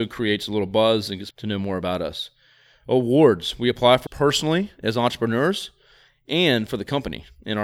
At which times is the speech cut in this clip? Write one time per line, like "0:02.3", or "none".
0:01.3
0:04.1